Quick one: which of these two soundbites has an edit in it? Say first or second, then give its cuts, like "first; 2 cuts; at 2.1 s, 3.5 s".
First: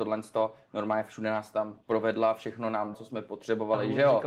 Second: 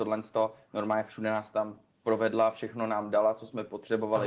first; 2 cuts; at 1.8 s, 2.9 s